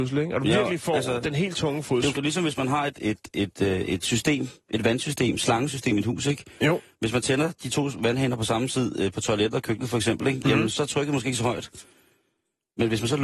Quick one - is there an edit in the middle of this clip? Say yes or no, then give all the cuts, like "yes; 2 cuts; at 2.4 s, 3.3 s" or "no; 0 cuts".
yes; 2 cuts; at 2.1 s, 2.9 s